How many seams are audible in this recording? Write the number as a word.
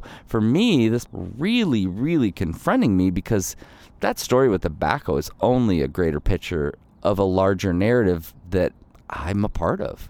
one